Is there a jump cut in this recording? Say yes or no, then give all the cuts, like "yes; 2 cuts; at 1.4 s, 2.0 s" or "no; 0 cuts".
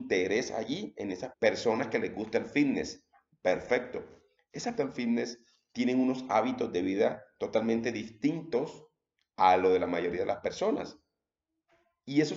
yes; 2 cuts; at 1.3 s, 4.8 s